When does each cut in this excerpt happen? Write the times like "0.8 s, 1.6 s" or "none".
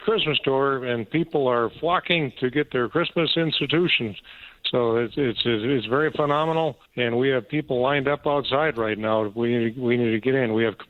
6.9 s